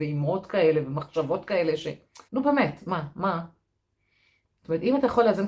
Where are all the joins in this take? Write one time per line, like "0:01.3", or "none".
0:02.3